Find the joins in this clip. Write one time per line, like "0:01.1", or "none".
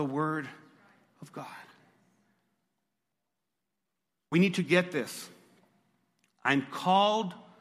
none